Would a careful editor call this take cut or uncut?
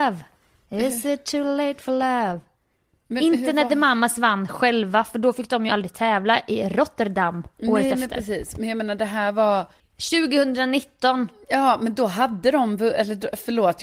uncut